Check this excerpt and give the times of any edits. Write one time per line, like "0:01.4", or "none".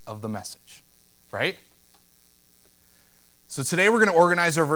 none